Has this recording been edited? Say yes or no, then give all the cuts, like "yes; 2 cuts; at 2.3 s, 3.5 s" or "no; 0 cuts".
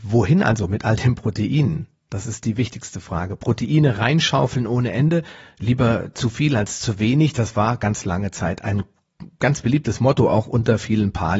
no; 0 cuts